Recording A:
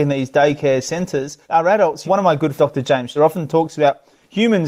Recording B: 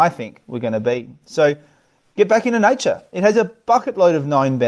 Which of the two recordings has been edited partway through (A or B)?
A